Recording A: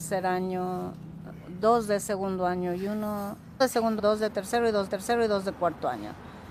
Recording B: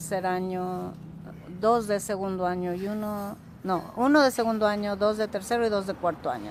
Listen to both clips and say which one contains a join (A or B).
A